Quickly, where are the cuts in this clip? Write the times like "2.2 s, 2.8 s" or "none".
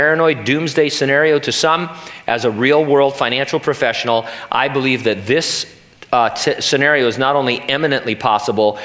none